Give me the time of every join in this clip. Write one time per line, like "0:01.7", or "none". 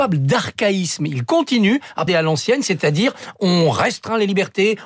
0:02.1